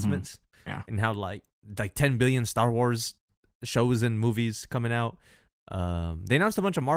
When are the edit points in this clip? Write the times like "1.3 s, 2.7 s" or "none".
none